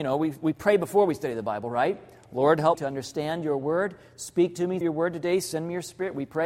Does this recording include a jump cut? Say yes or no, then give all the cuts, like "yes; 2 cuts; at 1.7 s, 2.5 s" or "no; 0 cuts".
yes; 2 cuts; at 2.7 s, 4.8 s